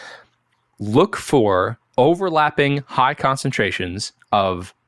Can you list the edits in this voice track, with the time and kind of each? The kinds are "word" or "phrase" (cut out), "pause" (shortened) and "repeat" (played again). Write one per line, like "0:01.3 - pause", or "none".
0:01.9 - pause